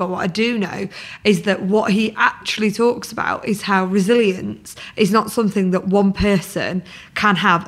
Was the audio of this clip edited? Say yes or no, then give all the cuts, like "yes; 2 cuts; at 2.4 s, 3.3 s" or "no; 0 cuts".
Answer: no; 0 cuts